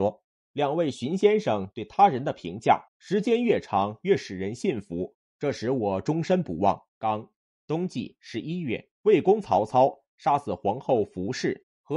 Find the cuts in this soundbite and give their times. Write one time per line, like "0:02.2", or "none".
0:02.9
0:06.9
0:08.9

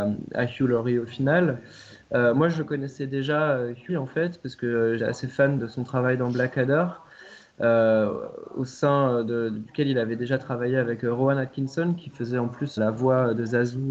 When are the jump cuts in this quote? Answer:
0:03.9
0:05.0
0:05.6
0:12.8

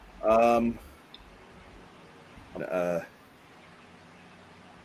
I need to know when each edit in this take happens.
0:02.6

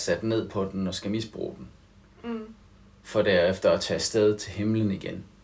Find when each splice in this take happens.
none

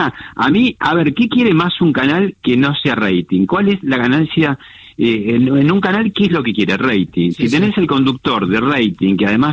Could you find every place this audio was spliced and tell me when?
none

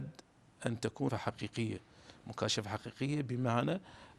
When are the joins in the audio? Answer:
0:01.1

